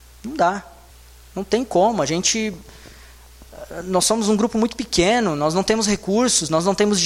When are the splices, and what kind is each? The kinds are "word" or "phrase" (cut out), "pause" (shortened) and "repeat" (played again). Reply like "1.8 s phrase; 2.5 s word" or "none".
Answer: 0.9 s pause